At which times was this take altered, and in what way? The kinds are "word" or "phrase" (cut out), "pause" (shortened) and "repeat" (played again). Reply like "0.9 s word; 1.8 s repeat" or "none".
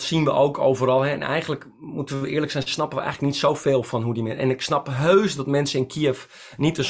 none